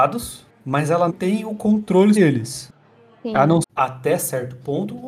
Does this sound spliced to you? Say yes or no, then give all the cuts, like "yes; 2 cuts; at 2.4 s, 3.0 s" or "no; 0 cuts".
yes; 3 cuts; at 1.1 s, 2.2 s, 3.6 s